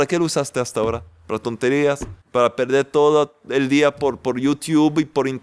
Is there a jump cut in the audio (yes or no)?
yes